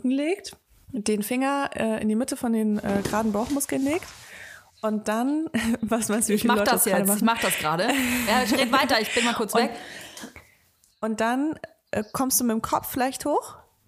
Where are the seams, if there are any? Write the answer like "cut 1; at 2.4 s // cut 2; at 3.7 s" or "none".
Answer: none

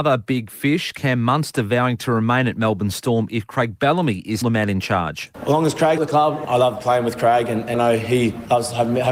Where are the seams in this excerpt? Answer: cut 1; at 4.4 s // cut 2; at 6.0 s // cut 3; at 7.7 s

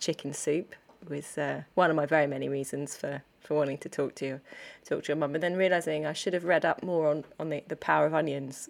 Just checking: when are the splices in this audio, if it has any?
cut 1; at 1.7 s

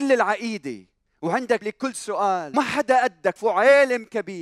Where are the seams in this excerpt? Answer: cut 1; at 1.6 s // cut 2; at 2.5 s // cut 3; at 3.4 s

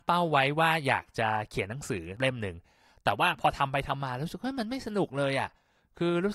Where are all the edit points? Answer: none

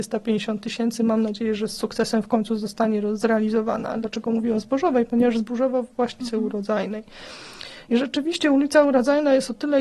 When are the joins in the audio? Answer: cut 1; at 6.2 s

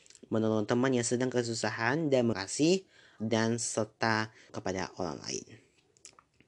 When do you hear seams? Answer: cut 1; at 2.3 s // cut 2; at 3.2 s // cut 3; at 4.5 s

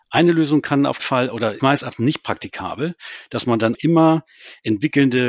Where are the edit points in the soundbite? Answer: cut 1; at 1.0 s // cut 2; at 1.6 s // cut 3; at 3.7 s

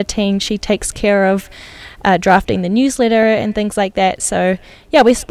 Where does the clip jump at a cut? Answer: none

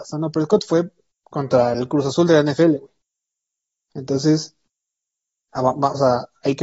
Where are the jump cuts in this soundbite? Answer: none

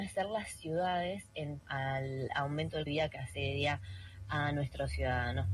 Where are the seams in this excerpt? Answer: cut 1; at 1.6 s // cut 2; at 2.9 s

